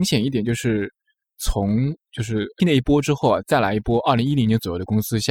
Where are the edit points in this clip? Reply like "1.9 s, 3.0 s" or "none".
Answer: 2.6 s